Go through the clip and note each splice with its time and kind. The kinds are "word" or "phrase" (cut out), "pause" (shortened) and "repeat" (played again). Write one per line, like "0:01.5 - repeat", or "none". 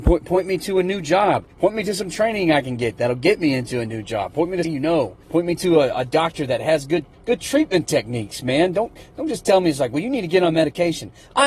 0:01.5 - pause
0:04.6 - word
0:05.2 - pause
0:07.1 - pause